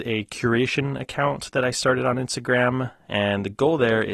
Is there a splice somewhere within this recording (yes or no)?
no